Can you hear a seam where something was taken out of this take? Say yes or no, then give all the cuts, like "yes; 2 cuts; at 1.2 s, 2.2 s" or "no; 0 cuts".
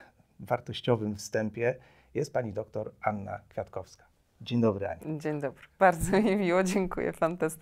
no; 0 cuts